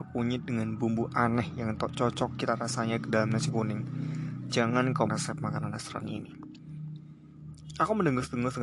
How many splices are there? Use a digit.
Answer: 1